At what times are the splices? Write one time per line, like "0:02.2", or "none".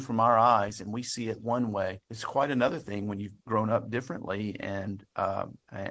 0:02.0
0:03.4